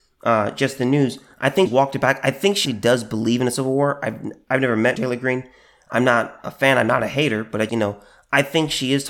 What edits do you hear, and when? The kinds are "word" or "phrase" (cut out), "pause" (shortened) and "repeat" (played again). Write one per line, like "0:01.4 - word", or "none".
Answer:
0:01.7 - word
0:02.7 - word
0:05.0 - word
0:07.7 - word